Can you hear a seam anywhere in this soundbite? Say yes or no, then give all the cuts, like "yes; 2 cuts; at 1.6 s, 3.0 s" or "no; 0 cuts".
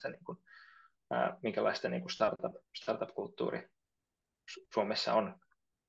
yes; 1 cut; at 2.7 s